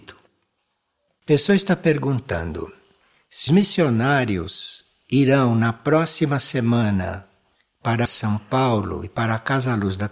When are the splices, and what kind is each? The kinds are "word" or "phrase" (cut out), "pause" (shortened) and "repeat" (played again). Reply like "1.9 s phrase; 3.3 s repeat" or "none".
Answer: 3.5 s word; 8.0 s word